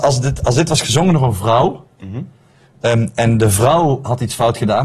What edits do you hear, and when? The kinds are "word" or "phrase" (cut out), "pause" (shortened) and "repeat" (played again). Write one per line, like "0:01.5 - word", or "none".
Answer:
none